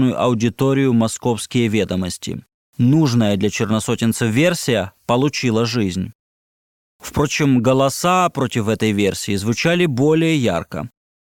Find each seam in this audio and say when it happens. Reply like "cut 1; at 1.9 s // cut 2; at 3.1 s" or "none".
none